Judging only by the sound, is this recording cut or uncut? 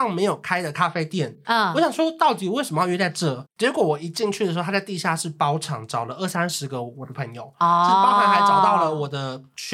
cut